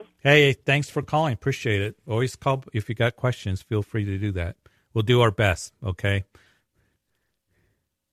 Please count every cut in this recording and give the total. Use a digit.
0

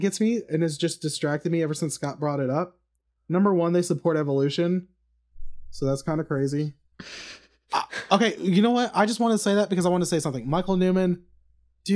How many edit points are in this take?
0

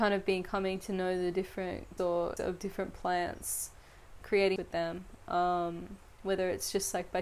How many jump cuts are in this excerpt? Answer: 4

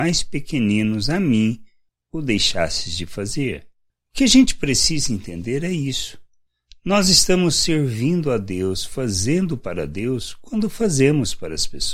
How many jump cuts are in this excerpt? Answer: 0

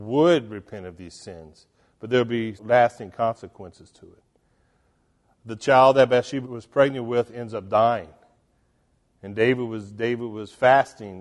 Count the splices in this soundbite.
2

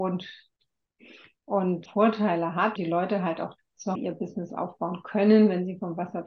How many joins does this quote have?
4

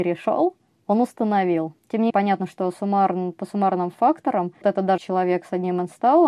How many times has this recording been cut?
4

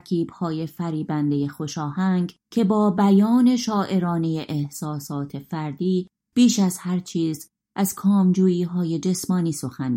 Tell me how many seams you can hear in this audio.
1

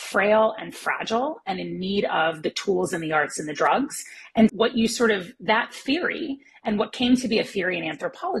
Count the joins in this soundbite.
1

